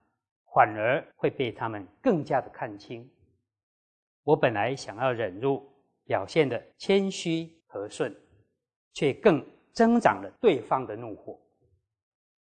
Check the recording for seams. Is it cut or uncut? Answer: cut